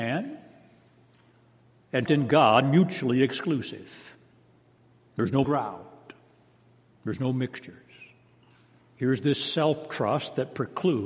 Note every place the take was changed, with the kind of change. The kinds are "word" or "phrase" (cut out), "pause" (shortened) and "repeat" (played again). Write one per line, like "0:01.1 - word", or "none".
0:02.1 - word
0:02.6 - word
0:05.4 - word